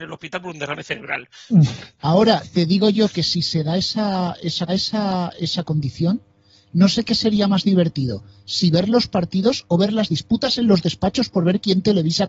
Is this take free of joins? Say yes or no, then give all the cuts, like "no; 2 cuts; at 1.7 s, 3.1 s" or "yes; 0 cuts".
no; 1 cut; at 4.7 s